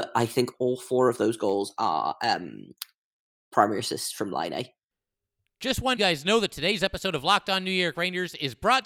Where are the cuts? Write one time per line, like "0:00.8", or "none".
0:06.0